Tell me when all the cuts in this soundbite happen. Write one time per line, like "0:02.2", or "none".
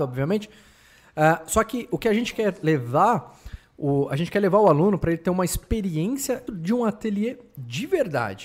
0:06.5